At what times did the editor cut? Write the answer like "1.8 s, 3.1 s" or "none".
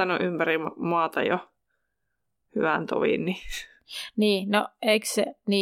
none